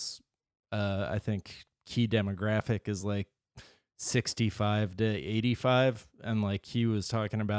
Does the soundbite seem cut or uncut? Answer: uncut